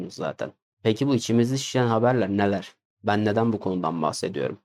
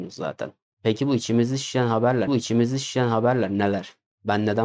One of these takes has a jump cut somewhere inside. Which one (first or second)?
second